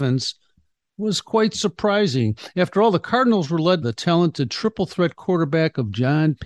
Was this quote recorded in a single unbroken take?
no; 1 cut; at 3.8 s

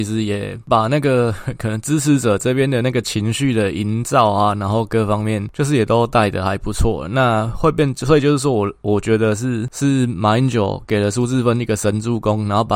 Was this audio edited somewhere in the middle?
no; 0 cuts

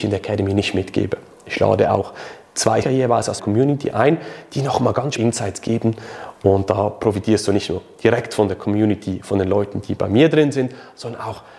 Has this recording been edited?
yes; 3 cuts; at 2.8 s, 3.4 s, 5.2 s

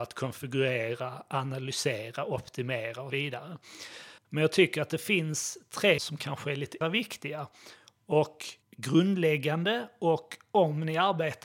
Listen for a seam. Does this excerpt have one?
yes; 5 cuts; at 3.1 s, 4.2 s, 6.0 s, 6.8 s, 8.6 s

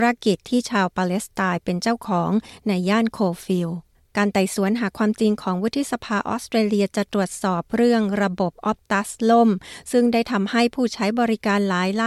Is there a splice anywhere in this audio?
no; 0 cuts

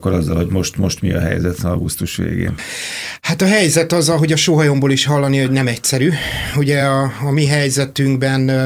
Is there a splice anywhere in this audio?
no; 0 cuts

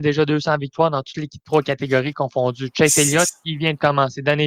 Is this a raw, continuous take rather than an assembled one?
yes; 0 cuts

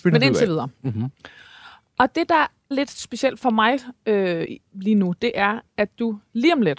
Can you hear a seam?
yes; 1 cut; at 2.7 s

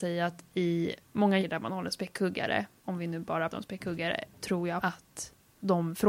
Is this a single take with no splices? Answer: no; 4 cuts; at 1.4 s, 3.5 s, 4.4 s, 4.8 s

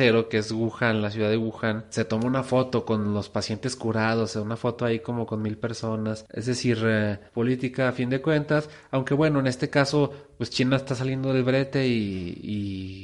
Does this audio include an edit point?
yes; 1 cut; at 7.3 s

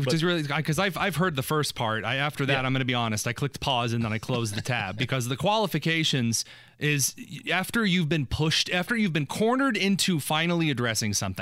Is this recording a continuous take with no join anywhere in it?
yes; 0 cuts

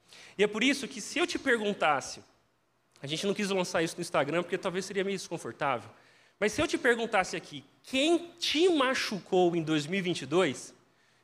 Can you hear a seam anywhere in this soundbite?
no; 0 cuts

